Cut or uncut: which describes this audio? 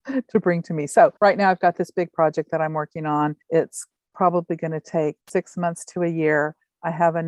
cut